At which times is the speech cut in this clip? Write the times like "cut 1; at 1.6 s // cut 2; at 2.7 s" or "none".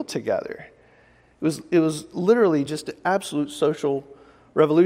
none